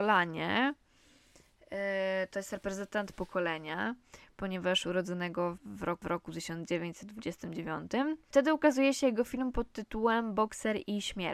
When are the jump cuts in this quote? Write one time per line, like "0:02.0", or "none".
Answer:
0:03.1
0:05.6
0:06.0